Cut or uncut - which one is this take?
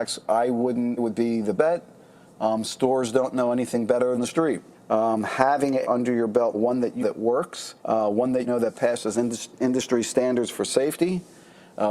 cut